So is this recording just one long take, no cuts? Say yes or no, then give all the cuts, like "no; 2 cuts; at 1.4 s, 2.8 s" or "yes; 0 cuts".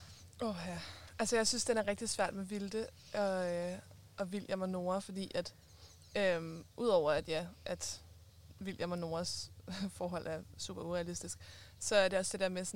yes; 0 cuts